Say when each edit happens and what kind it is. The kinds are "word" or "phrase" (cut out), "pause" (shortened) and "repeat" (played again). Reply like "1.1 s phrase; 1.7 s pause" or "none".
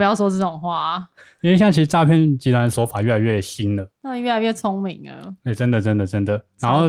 none